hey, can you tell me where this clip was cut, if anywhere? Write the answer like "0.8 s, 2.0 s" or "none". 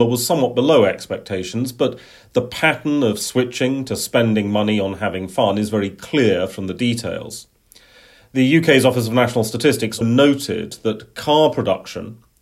10.0 s